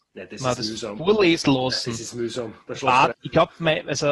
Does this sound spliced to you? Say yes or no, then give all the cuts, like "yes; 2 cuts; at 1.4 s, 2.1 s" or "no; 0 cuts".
yes; 2 cuts; at 1.4 s, 3.1 s